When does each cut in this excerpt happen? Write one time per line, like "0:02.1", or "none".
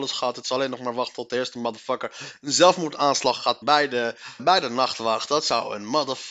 0:03.6
0:04.4